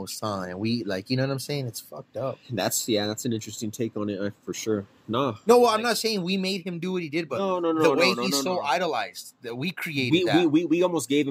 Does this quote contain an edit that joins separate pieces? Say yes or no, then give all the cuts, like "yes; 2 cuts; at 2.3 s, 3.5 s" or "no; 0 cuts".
no; 0 cuts